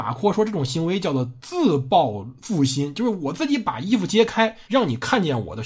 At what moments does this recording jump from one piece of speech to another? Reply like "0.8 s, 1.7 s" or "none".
2.4 s, 4.6 s

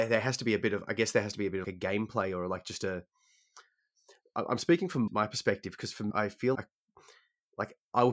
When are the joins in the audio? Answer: 1.6 s, 5.1 s, 6.1 s, 6.5 s

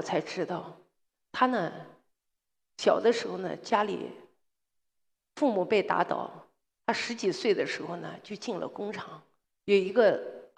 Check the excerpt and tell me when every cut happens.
none

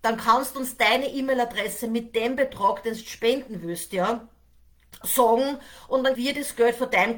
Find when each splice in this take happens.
5.0 s, 6.2 s

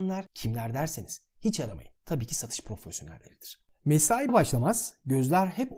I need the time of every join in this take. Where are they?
4.3 s

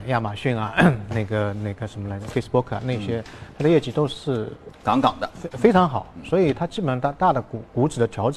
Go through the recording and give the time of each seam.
none

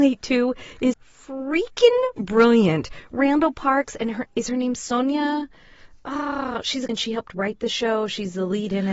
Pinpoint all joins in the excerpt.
0.9 s, 6.9 s

